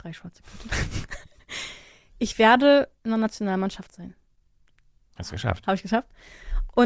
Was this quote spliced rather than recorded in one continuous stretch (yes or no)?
no